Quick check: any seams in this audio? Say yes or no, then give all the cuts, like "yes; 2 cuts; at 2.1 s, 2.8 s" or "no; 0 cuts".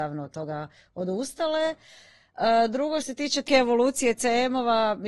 yes; 2 cuts; at 3.0 s, 3.5 s